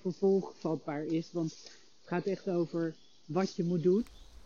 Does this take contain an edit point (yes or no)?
no